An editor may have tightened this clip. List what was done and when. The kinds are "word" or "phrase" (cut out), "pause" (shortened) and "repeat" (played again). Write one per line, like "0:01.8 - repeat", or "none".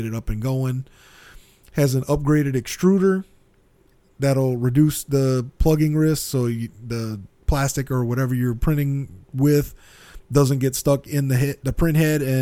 none